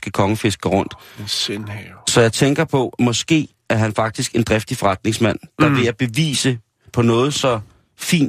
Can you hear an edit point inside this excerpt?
yes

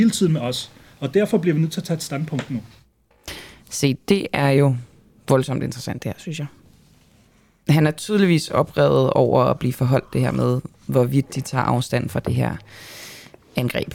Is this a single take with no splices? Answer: yes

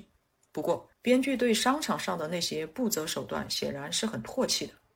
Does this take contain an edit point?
yes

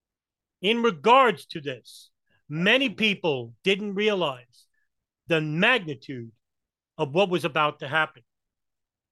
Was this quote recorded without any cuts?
yes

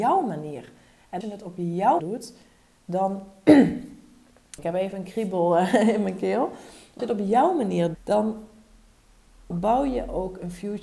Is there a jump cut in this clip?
yes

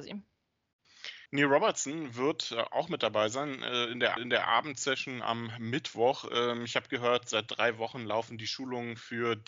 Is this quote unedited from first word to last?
no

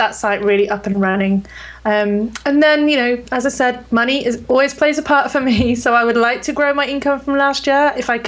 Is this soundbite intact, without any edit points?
yes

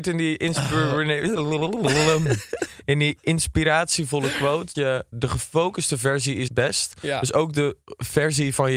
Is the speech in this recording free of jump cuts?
no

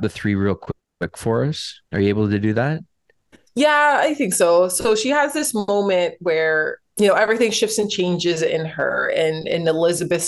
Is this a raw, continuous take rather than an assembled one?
no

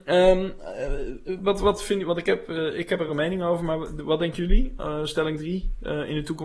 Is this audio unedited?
yes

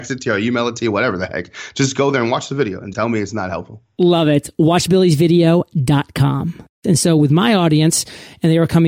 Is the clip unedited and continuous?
no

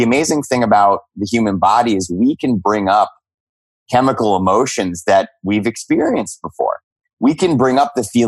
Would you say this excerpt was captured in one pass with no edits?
yes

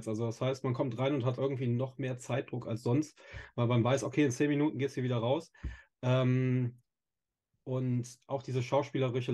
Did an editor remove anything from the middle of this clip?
yes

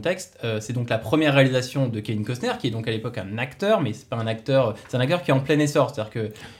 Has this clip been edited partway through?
no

